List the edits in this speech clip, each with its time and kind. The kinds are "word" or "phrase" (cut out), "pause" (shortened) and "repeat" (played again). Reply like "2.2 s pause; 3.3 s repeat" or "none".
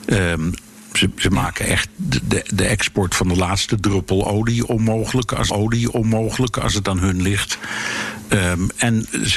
5.5 s repeat